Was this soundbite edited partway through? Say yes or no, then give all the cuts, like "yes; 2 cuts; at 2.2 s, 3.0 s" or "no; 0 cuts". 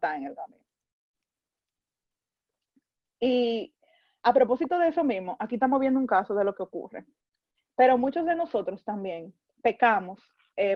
no; 0 cuts